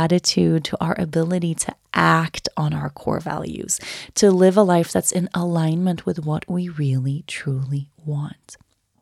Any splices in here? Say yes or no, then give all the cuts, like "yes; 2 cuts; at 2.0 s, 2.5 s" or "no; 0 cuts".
no; 0 cuts